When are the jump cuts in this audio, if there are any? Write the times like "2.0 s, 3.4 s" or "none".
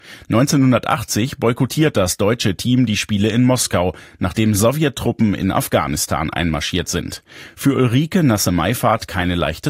none